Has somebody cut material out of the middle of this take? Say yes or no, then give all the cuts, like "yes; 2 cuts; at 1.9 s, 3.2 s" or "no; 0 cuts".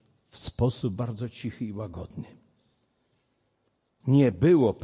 no; 0 cuts